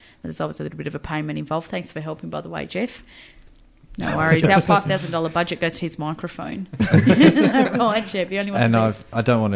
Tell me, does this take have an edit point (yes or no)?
no